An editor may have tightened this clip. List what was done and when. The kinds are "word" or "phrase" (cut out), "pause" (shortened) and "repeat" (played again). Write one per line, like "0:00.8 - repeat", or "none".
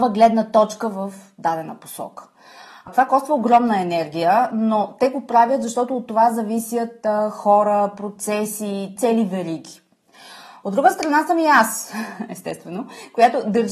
none